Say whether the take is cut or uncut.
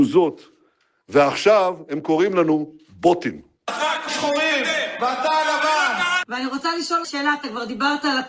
cut